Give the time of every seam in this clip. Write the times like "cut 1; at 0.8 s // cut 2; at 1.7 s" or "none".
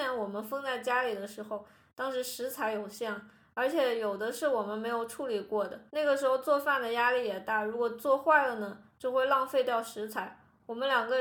cut 1; at 5.9 s